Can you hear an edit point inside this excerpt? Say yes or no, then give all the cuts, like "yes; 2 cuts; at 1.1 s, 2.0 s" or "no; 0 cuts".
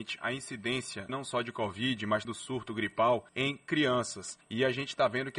yes; 4 cuts; at 1.1 s, 2.2 s, 3.3 s, 4.4 s